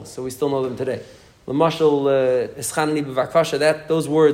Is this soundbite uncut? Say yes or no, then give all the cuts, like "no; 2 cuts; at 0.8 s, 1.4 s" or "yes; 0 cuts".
no; 1 cut; at 2.5 s